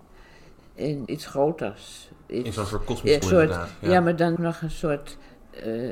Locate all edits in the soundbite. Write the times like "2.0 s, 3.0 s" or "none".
1.1 s, 3.2 s, 4.4 s